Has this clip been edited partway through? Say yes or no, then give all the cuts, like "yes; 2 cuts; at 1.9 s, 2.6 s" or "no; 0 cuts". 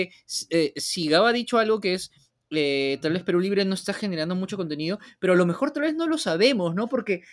no; 0 cuts